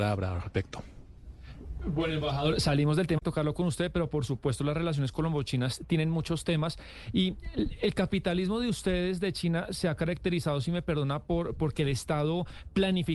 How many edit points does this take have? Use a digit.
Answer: 1